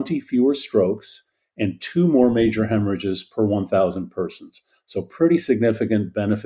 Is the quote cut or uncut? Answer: uncut